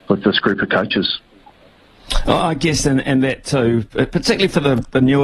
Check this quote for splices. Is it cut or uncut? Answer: uncut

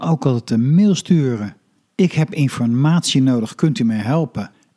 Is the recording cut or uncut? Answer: uncut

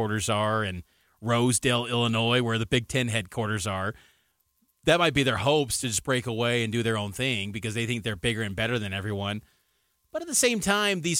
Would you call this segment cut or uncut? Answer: uncut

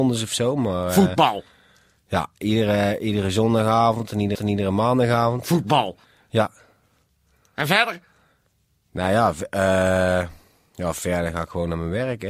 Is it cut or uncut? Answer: cut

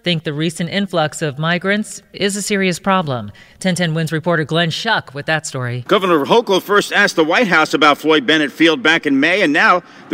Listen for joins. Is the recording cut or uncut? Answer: uncut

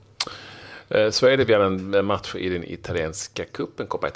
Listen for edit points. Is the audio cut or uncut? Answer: uncut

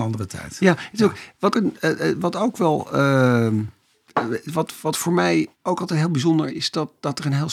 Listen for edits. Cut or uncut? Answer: cut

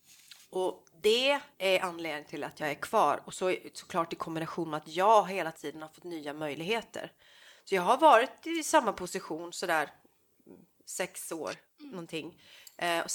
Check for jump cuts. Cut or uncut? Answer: cut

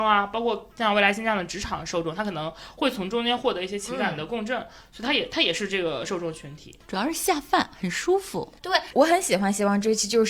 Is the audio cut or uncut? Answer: cut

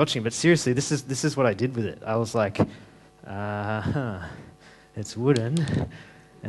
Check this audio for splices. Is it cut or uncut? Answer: uncut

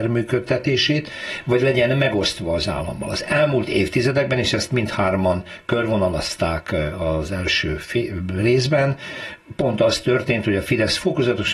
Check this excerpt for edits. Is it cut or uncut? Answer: uncut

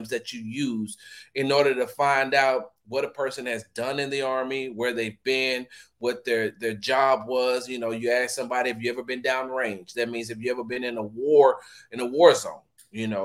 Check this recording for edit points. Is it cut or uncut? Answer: uncut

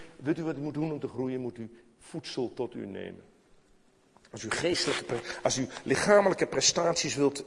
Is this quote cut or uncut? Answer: uncut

